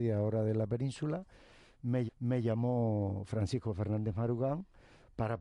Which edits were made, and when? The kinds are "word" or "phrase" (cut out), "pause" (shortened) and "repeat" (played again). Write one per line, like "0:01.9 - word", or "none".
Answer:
0:02.1 - repeat